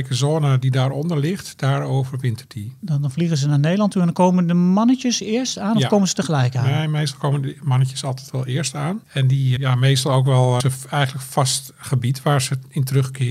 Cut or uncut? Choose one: cut